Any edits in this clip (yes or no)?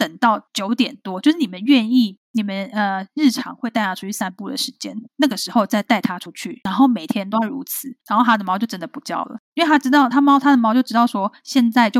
yes